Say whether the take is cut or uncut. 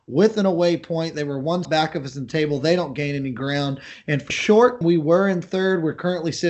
cut